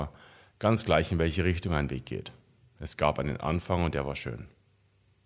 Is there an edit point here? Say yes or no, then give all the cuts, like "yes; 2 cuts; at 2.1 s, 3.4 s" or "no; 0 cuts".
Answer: no; 0 cuts